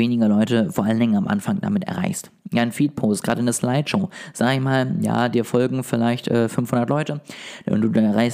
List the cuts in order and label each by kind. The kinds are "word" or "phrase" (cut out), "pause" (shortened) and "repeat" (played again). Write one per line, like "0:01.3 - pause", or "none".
none